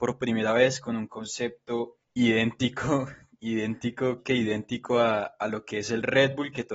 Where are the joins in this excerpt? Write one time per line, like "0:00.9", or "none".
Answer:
0:02.0
0:04.2